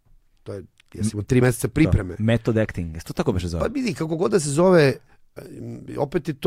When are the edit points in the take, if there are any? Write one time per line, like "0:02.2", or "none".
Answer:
none